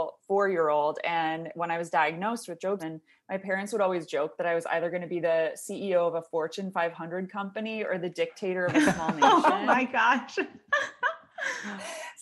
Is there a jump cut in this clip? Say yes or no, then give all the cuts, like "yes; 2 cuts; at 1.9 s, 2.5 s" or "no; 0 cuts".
yes; 1 cut; at 2.8 s